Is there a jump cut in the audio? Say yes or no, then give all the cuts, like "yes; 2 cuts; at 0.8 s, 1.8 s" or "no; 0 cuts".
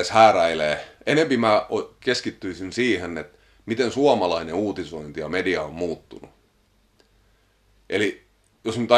no; 0 cuts